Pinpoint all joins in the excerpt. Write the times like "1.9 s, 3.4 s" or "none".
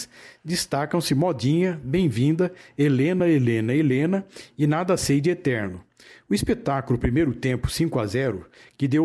none